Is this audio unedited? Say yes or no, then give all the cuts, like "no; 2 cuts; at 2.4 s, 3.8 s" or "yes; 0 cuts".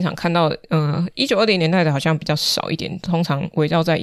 yes; 0 cuts